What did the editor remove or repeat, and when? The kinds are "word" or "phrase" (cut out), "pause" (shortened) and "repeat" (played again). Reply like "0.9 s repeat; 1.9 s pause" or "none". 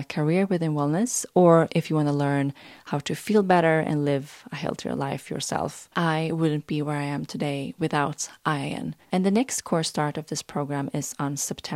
5.9 s pause; 9.0 s pause